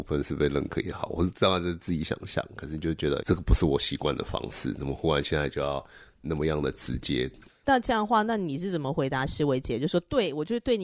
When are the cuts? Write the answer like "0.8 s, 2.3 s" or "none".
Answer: 3.2 s, 6.2 s